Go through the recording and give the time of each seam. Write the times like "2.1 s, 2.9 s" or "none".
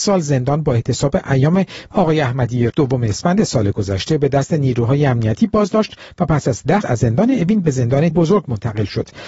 1.9 s, 2.7 s, 6.8 s, 8.1 s